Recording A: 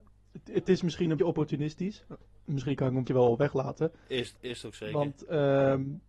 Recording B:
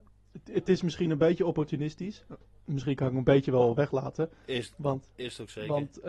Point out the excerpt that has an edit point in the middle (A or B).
A